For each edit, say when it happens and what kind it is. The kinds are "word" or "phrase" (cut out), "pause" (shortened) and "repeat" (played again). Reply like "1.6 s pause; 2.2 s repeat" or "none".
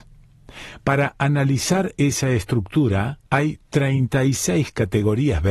3.3 s pause